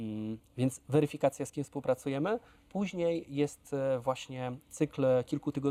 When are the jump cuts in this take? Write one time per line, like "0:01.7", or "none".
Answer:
none